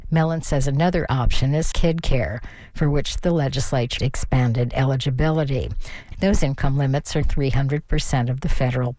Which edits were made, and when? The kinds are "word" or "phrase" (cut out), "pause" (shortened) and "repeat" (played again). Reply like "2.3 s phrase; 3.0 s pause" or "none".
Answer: 1.7 s word; 4.0 s word; 7.2 s word